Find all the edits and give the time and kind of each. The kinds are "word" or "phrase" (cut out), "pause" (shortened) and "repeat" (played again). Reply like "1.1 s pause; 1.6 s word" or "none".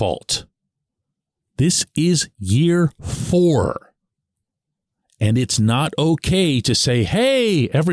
none